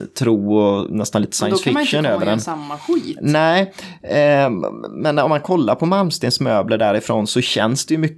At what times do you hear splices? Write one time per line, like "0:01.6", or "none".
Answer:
none